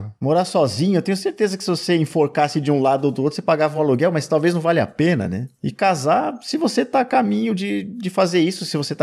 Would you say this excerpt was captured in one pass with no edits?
yes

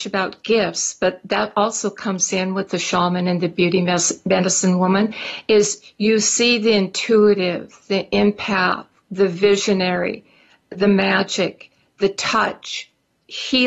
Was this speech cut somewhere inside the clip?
no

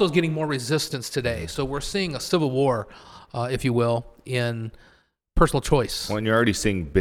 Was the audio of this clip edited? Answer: no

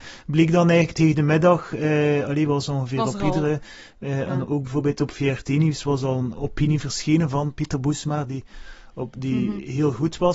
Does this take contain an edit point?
no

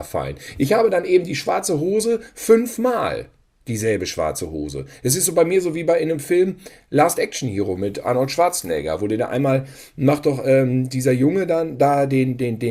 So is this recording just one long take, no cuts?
yes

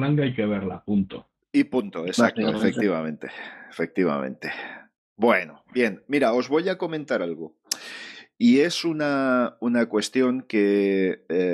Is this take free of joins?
yes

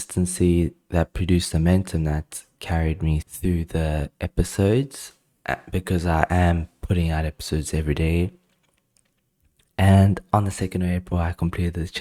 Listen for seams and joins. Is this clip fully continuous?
no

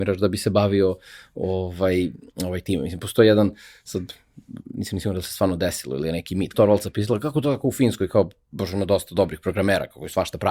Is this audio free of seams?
no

